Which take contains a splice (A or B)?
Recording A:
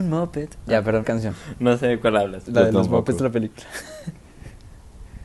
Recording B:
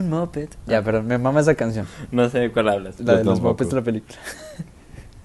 A